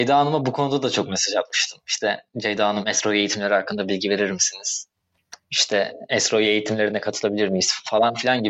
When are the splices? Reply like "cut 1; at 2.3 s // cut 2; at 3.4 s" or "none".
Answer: cut 1; at 2.3 s // cut 2; at 5.4 s